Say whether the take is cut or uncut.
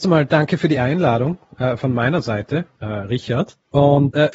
uncut